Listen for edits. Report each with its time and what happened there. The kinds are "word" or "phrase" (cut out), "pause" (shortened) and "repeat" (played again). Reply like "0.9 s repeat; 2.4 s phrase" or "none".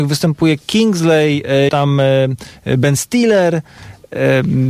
1.7 s word